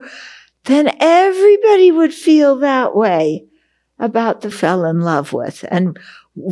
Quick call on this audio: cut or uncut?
cut